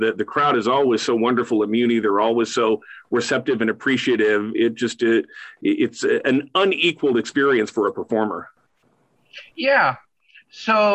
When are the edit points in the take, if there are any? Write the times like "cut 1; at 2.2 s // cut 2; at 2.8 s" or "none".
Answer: cut 1; at 9.5 s